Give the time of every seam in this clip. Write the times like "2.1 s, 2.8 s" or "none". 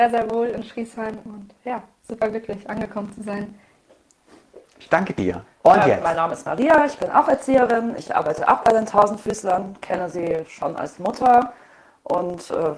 none